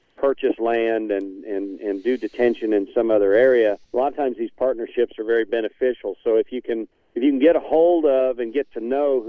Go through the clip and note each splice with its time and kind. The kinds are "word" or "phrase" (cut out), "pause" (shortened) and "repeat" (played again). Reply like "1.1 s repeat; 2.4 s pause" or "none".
3.8 s pause; 6.9 s pause